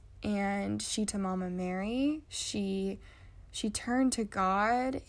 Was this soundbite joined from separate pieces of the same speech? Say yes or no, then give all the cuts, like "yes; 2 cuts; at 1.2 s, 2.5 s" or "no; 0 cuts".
yes; 1 cut; at 1.1 s